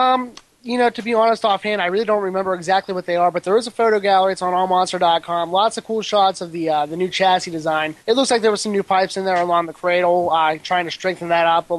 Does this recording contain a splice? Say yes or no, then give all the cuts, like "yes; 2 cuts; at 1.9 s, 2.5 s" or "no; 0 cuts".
yes; 1 cut; at 8.0 s